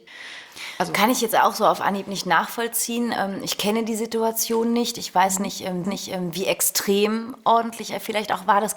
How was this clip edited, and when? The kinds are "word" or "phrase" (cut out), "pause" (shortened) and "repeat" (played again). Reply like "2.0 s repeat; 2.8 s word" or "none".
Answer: 5.8 s repeat